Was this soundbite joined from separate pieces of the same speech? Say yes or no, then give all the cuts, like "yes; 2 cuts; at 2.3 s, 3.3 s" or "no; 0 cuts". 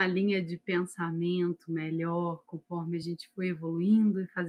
no; 0 cuts